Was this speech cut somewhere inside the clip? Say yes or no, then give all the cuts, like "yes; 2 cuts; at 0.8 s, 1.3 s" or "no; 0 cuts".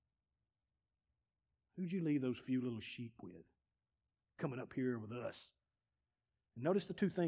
no; 0 cuts